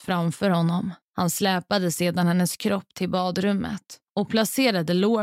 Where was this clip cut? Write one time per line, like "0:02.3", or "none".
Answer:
0:01.0
0:04.1